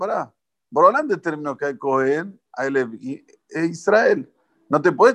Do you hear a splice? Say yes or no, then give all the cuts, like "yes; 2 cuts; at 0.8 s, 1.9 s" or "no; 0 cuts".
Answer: no; 0 cuts